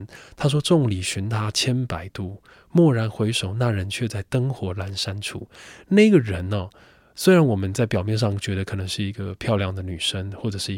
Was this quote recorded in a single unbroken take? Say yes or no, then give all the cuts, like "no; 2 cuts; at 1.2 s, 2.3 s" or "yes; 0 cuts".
yes; 0 cuts